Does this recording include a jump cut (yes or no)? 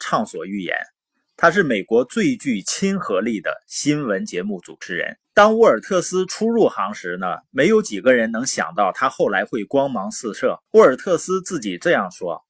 yes